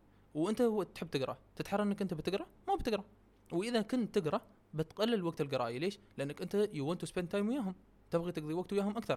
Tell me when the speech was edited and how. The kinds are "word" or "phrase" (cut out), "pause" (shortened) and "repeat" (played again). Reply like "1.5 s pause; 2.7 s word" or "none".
none